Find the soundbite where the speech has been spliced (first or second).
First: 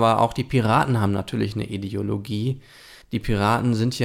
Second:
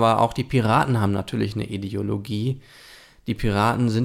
first